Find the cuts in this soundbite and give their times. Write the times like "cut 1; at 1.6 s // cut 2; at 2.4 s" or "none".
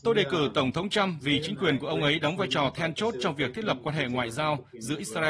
none